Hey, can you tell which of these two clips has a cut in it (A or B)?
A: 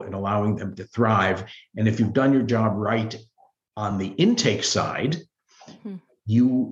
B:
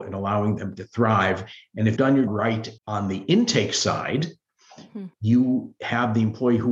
B